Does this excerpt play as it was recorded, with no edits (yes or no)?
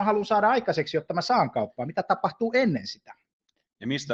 yes